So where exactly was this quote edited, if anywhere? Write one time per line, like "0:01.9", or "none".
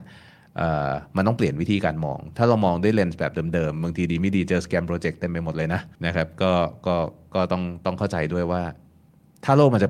0:05.9